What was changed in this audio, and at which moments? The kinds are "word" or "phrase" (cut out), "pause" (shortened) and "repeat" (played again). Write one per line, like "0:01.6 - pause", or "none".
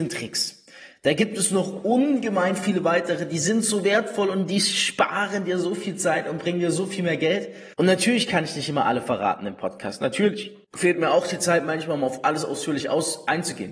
0:07.7 - pause
0:10.6 - pause